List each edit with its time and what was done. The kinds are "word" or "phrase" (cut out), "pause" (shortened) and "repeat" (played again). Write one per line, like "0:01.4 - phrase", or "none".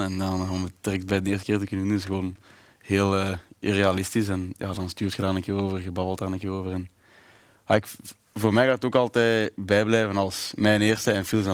none